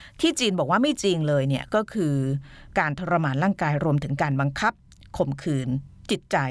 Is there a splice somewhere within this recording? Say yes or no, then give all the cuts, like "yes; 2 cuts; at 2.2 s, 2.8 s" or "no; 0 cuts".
no; 0 cuts